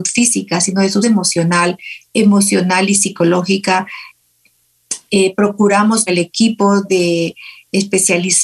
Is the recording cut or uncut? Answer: cut